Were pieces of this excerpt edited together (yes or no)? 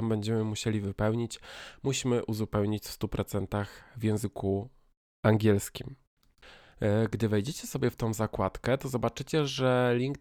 no